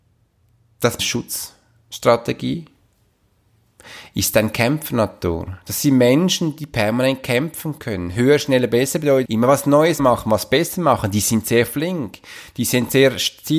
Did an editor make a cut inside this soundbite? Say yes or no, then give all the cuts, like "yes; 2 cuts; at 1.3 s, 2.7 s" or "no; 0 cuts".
yes; 3 cuts; at 1.0 s, 9.2 s, 10.0 s